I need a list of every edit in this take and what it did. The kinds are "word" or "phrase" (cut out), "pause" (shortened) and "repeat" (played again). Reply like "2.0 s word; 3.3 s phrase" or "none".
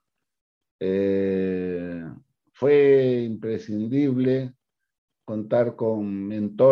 none